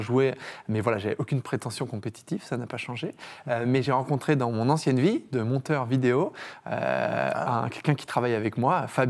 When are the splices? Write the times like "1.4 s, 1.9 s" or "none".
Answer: none

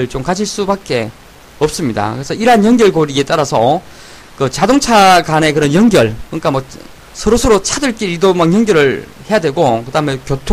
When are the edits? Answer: none

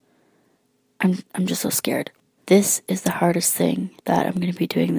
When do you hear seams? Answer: 2.4 s, 4.0 s

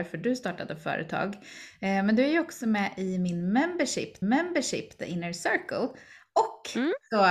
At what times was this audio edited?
4.2 s

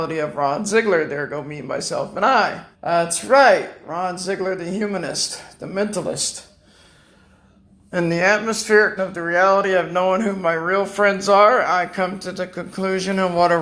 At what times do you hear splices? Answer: 2.7 s, 9.0 s

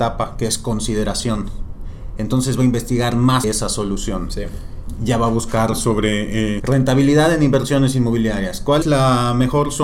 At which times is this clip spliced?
3.4 s, 6.6 s, 8.8 s

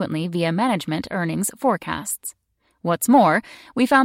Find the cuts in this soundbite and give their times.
none

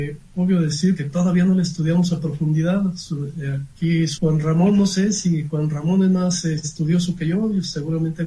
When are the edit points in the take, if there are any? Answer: 1.0 s, 4.2 s

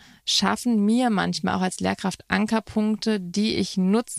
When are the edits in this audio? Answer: none

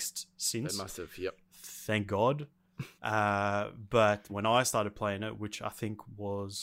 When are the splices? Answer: 3.0 s, 4.3 s

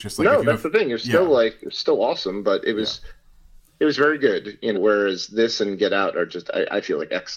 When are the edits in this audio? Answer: 4.7 s

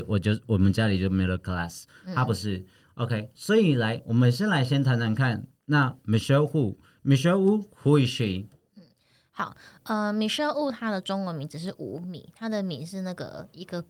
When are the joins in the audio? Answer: 3.3 s

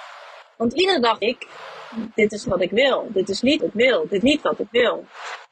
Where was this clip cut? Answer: 1.2 s, 2.4 s, 3.6 s, 4.2 s

